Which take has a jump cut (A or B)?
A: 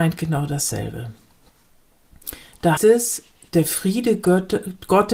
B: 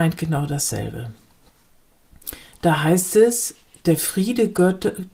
A